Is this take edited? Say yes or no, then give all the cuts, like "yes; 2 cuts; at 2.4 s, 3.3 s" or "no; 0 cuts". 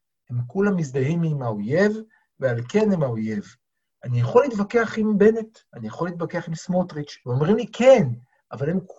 yes; 2 cuts; at 5.7 s, 7.2 s